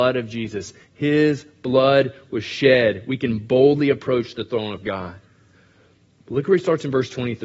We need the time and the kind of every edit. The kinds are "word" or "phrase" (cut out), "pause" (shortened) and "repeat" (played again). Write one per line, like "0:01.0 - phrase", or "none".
none

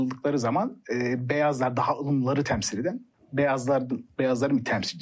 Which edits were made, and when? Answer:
none

